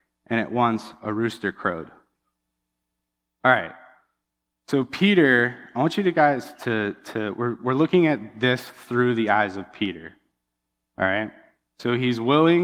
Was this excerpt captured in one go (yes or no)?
yes